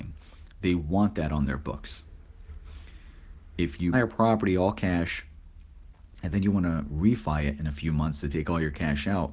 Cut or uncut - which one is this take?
cut